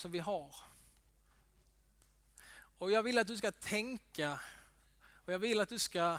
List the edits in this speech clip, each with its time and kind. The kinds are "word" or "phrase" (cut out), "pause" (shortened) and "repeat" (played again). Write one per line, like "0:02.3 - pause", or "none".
none